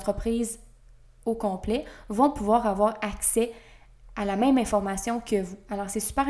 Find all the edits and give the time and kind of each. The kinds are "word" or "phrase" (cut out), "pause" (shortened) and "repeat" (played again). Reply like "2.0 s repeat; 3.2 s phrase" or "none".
none